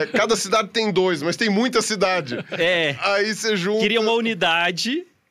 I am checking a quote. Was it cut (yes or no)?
no